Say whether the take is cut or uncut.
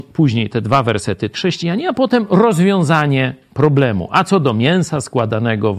cut